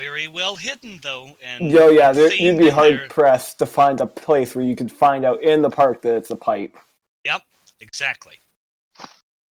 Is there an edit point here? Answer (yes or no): no